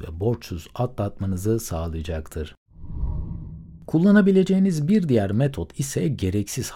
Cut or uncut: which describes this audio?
uncut